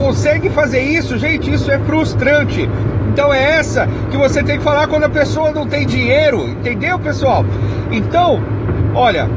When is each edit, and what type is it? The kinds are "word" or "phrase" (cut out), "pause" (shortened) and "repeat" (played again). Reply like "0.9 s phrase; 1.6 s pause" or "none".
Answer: none